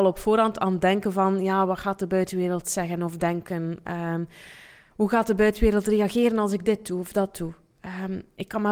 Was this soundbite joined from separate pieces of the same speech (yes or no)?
no